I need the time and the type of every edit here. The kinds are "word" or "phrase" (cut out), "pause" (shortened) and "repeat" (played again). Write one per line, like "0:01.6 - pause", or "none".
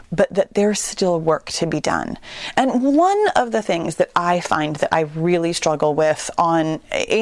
none